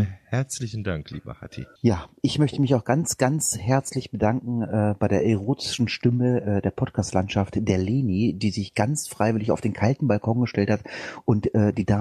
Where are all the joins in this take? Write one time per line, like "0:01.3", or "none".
0:01.8